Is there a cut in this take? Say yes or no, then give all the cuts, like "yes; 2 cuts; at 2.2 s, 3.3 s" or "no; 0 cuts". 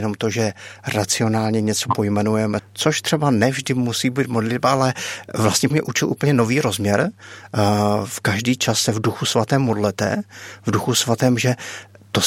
yes; 2 cuts; at 2.6 s, 5.7 s